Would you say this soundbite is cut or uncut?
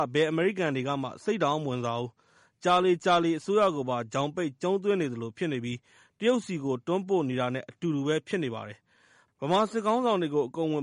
uncut